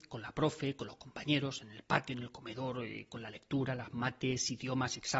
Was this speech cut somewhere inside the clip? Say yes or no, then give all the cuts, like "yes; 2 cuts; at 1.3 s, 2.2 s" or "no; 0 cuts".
no; 0 cuts